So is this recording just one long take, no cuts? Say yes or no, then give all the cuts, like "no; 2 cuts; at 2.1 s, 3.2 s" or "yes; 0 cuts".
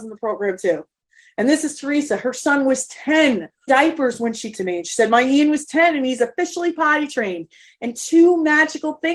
no; 2 cuts; at 3.7 s, 4.5 s